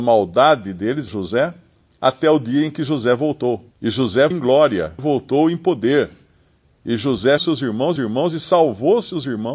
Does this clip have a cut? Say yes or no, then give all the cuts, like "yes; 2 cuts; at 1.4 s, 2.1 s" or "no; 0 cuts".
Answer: yes; 6 cuts; at 1.1 s, 3.7 s, 4.3 s, 5.0 s, 7.4 s, 8.0 s